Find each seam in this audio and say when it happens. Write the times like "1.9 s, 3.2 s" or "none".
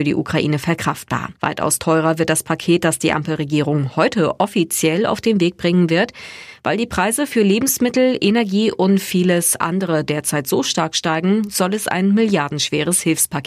1.4 s